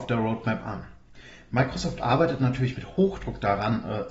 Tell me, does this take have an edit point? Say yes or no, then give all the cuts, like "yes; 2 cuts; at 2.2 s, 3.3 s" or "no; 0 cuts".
no; 0 cuts